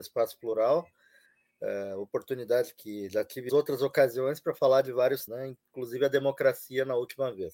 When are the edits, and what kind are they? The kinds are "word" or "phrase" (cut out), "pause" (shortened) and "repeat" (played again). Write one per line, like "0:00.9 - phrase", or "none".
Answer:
0:03.5 - word
0:05.3 - word